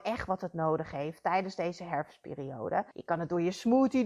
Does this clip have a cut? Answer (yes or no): yes